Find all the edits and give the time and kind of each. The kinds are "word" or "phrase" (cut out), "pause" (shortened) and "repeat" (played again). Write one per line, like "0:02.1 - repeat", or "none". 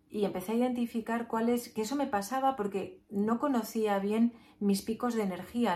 none